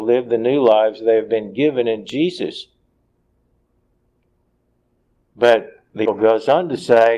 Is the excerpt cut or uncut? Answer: cut